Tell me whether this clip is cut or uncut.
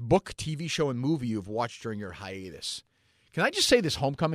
uncut